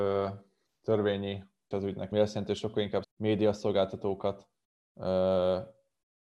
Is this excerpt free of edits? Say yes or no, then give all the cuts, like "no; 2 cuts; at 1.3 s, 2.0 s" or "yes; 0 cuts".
no; 3 cuts; at 1.7 s, 2.1 s, 3.0 s